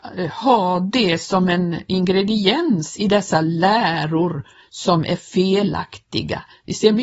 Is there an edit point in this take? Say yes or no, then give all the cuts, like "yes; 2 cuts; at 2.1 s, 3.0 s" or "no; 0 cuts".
no; 0 cuts